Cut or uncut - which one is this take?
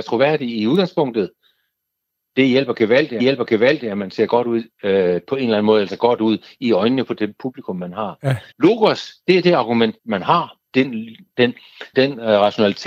cut